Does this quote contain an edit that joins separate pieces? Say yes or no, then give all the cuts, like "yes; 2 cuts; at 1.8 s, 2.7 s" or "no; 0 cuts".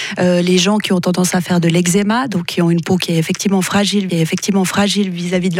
yes; 1 cut; at 4.1 s